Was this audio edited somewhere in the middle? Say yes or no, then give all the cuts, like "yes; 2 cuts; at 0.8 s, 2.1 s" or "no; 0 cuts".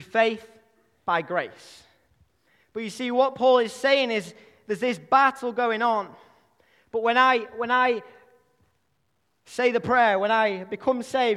no; 0 cuts